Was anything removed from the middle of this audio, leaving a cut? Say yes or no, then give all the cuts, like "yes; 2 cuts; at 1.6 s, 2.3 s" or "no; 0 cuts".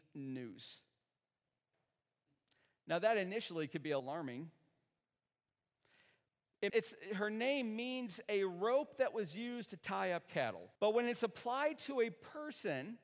yes; 3 cuts; at 4.0 s, 6.7 s, 10.8 s